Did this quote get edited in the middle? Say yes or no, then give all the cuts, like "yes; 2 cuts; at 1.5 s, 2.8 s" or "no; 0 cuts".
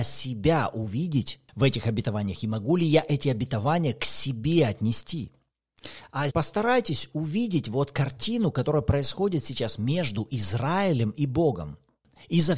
yes; 1 cut; at 6.3 s